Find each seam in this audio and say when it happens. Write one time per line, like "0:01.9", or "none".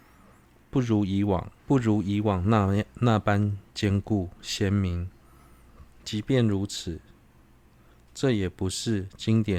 0:01.6